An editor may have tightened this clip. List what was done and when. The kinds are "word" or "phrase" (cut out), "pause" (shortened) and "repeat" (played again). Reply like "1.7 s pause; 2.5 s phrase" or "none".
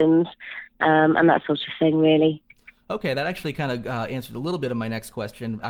none